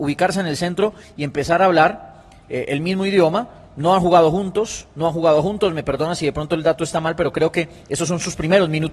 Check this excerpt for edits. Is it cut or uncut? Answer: uncut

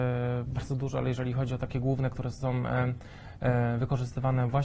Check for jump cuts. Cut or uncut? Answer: uncut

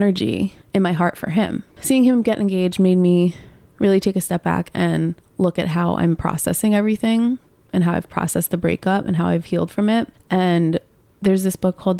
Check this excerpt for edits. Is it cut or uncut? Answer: uncut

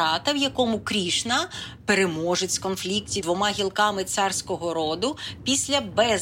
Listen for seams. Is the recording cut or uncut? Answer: cut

